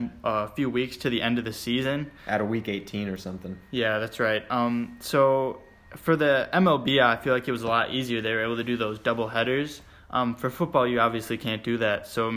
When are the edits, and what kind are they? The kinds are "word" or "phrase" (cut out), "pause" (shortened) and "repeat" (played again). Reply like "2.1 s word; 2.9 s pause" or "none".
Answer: none